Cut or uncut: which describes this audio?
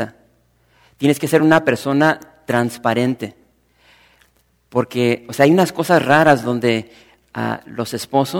uncut